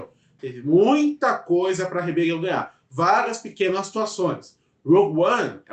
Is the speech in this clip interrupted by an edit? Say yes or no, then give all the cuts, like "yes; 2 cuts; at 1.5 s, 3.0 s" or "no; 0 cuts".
no; 0 cuts